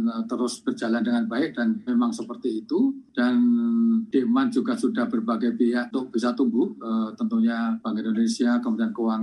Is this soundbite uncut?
no; 2 cuts; at 1.9 s, 5.9 s

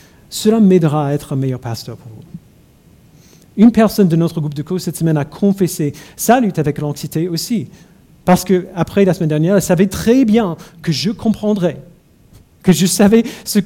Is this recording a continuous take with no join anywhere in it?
yes; 0 cuts

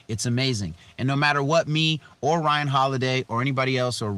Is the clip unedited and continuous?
yes; 0 cuts

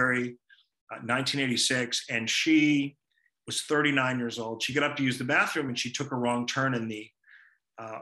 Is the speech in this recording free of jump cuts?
yes; 0 cuts

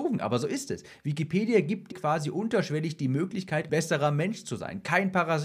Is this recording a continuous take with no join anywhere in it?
no; 2 cuts; at 1.9 s, 3.7 s

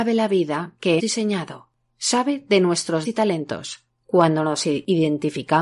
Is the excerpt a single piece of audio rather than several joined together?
no; 2 cuts; at 1.0 s, 3.0 s

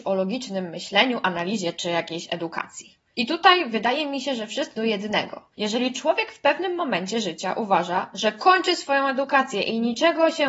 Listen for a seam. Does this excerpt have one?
yes; 1 cut; at 4.8 s

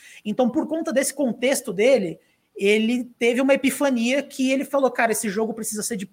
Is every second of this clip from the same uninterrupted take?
yes; 0 cuts

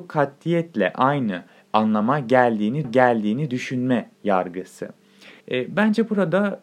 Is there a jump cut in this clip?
yes; 3 cuts; at 1.5 s, 2.8 s, 5.4 s

